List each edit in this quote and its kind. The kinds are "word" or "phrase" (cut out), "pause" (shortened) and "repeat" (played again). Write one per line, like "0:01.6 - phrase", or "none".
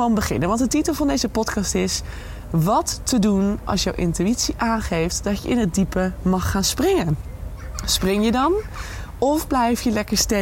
none

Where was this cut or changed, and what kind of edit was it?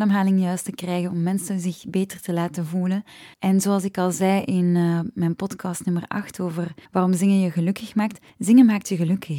0:03.3 - pause
0:06.9 - pause
0:08.3 - pause

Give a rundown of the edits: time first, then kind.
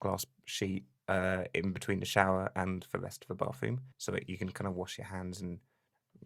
0:03.9 - pause

